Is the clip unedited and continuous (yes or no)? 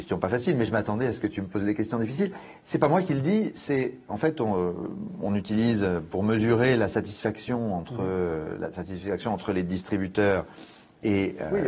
yes